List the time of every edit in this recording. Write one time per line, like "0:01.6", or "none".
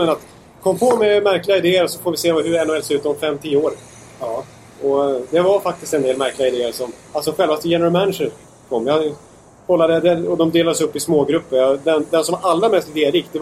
none